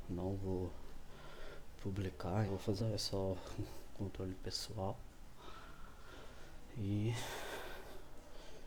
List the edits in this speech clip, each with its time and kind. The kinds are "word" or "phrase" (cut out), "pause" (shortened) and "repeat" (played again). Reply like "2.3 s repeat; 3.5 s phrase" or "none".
2.5 s phrase; 2.8 s word